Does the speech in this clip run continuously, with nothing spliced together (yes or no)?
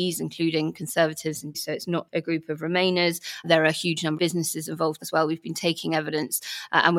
no